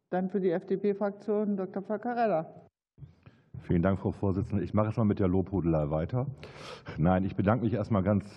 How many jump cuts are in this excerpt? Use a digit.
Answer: 0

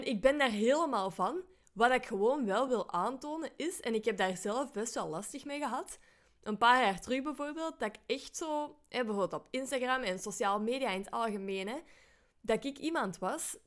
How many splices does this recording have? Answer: 0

